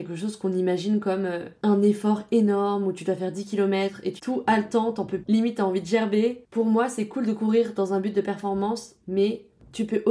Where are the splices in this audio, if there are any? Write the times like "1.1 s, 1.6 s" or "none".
4.2 s, 5.2 s